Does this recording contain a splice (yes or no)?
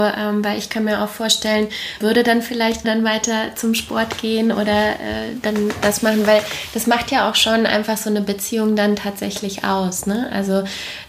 yes